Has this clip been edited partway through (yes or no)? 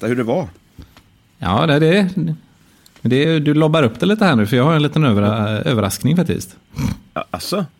no